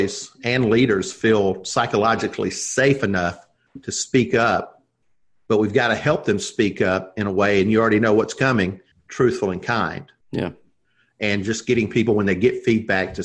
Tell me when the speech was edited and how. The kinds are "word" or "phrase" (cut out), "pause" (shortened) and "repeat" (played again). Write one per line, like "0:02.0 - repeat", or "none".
0:08.9 - pause
0:10.2 - pause